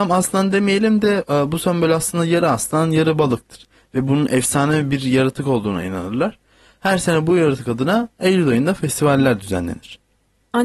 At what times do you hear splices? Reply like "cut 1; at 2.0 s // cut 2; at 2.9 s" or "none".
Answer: none